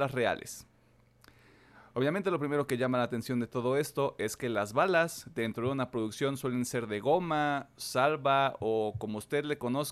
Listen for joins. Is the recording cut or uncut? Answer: uncut